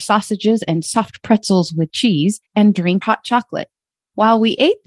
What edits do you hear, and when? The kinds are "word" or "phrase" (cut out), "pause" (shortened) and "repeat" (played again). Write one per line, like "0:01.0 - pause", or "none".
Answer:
0:02.5 - pause
0:03.0 - word